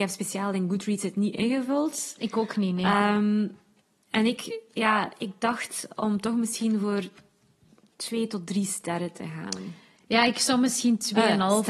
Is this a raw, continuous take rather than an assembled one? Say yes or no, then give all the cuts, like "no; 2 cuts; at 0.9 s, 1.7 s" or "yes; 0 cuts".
yes; 0 cuts